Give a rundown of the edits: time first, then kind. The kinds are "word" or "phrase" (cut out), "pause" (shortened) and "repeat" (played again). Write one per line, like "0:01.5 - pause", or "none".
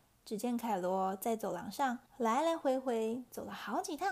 0:02.1 - pause